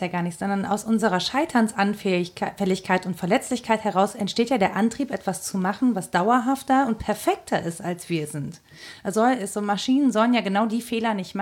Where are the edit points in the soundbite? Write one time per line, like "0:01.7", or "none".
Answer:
0:09.1